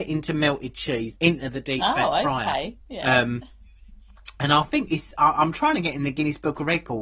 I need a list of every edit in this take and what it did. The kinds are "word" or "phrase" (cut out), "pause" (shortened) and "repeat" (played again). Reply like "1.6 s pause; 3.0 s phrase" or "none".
1.2 s word